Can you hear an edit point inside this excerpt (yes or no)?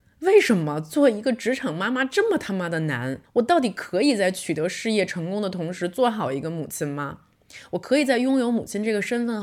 yes